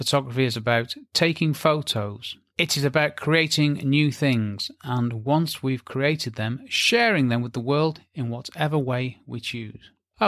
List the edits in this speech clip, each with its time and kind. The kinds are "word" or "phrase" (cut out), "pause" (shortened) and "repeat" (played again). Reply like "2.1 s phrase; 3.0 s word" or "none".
none